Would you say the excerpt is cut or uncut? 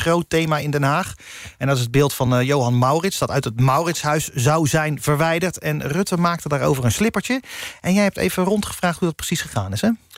uncut